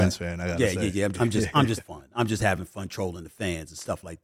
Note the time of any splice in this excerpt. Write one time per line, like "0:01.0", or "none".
0:01.1
0:01.8